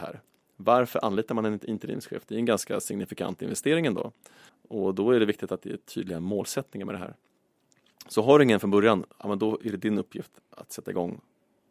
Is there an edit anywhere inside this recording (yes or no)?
yes